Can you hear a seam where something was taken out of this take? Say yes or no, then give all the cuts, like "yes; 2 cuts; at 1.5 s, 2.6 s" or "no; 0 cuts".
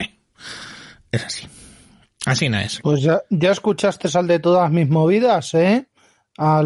no; 0 cuts